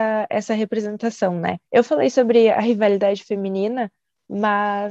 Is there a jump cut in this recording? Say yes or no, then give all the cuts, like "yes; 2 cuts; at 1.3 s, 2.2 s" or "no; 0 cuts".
yes; 1 cut; at 1.6 s